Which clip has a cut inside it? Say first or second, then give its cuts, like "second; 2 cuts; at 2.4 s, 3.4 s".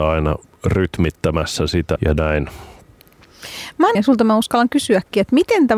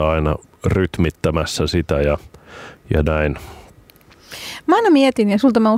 first; 2 cuts; at 2.0 s, 3.9 s